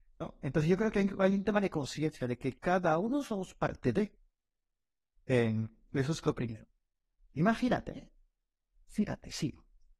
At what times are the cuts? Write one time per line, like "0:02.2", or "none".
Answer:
none